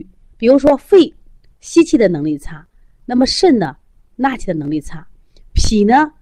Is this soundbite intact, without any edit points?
yes; 0 cuts

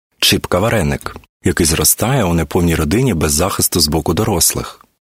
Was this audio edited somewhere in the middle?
no; 0 cuts

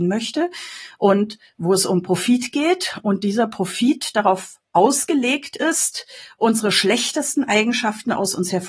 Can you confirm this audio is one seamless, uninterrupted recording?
yes; 0 cuts

